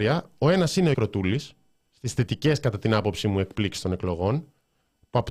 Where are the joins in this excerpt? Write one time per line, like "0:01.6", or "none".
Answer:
0:00.9